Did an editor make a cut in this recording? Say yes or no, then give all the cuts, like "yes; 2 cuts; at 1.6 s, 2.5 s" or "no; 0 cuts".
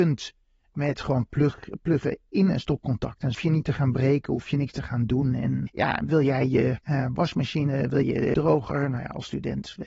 yes; 5 cuts; at 3.3 s, 5.7 s, 6.8 s, 8.0 s, 8.3 s